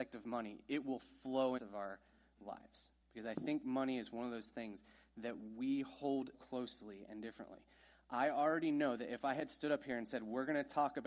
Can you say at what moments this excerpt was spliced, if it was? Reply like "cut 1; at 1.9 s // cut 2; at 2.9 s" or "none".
cut 1; at 1.6 s // cut 2; at 3.0 s // cut 3; at 6.3 s